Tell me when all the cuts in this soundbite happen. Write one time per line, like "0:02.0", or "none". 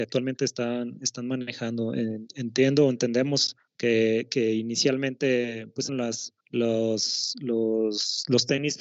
0:03.7
0:05.9
0:06.4